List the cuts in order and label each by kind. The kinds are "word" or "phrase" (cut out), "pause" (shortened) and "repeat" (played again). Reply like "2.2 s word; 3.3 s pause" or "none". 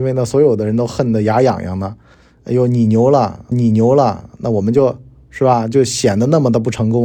3.5 s repeat

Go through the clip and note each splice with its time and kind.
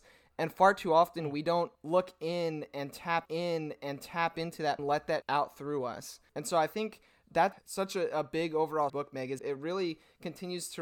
1.7 s pause; 3.3 s repeat; 4.8 s phrase; 5.2 s word; 6.3 s pause; 7.5 s word; 8.9 s phrase; 9.4 s word

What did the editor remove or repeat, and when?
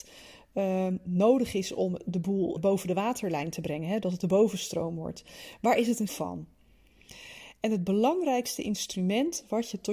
2.6 s word; 6.1 s word

